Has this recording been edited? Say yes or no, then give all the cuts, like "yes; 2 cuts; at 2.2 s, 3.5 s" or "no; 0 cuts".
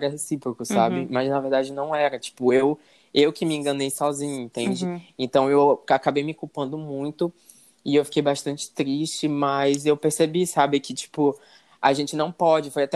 no; 0 cuts